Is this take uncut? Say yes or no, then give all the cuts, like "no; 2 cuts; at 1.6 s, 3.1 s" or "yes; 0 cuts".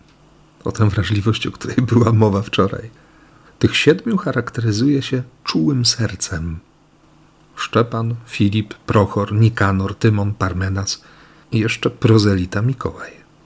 yes; 0 cuts